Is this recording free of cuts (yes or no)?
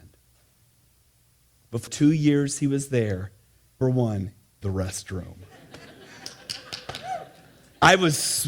no